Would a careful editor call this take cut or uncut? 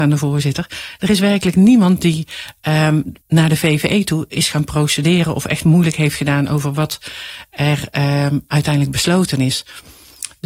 cut